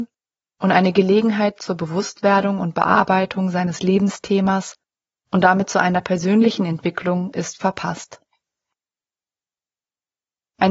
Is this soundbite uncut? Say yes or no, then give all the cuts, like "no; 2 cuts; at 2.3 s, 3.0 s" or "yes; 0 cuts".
yes; 0 cuts